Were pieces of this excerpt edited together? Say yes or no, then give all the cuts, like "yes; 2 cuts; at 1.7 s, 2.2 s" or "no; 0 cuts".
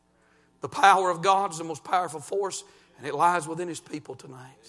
no; 0 cuts